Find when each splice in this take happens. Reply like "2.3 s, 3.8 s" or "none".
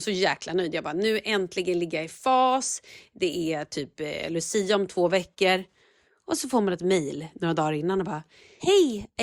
none